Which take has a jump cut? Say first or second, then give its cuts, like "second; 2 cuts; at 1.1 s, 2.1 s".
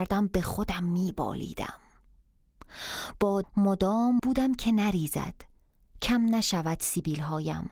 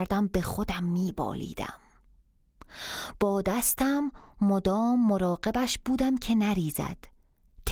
first; 3 cuts; at 3.4 s, 4.2 s, 6.0 s